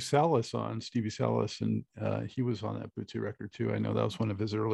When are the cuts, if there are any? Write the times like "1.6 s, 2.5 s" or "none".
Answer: none